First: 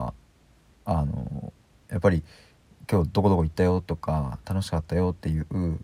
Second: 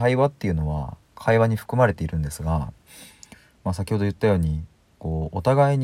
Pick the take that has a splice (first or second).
second